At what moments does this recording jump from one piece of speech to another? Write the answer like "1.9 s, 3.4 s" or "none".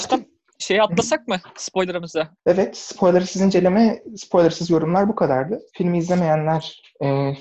2.4 s, 5.7 s